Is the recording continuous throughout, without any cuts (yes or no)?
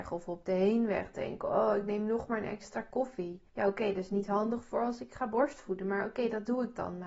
no